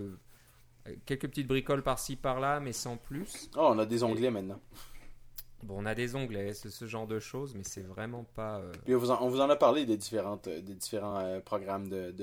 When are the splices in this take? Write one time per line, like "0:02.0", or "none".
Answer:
none